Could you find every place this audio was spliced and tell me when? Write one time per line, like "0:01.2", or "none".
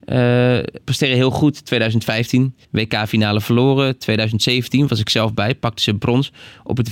0:02.6